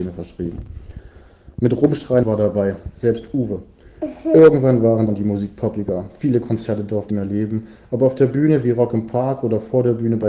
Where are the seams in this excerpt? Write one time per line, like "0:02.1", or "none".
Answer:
0:02.2
0:05.1
0:07.1